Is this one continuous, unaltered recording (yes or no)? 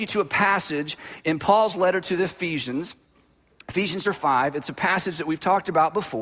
no